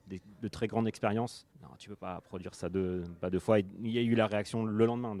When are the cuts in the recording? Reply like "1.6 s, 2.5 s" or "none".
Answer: 1.5 s

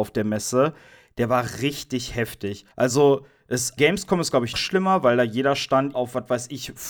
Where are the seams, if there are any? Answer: 2.7 s, 3.8 s, 4.5 s, 5.9 s

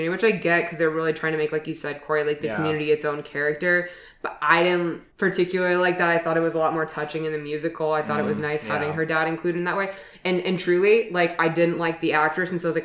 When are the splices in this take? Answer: 5.1 s

